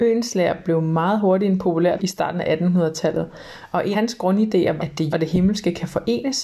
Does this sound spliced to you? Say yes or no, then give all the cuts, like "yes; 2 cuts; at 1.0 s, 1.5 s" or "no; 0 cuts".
yes; 4 cuts; at 2.0 s, 3.9 s, 4.8 s, 5.1 s